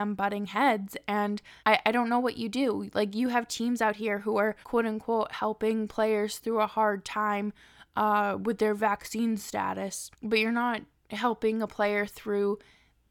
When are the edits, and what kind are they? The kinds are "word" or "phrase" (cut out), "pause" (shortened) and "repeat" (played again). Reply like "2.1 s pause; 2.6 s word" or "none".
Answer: 1.6 s pause; 4.6 s pause; 10.1 s pause; 10.9 s pause

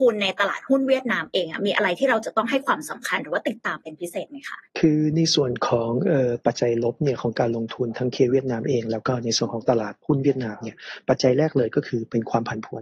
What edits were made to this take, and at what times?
4.7 s pause; 10.0 s pause

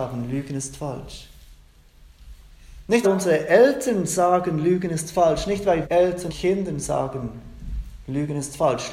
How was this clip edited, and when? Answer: 3.0 s word; 5.8 s word; 6.3 s word

